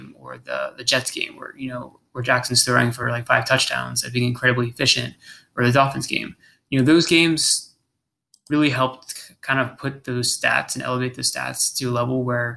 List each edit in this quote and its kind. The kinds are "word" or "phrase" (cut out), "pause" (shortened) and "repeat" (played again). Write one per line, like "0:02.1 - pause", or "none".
none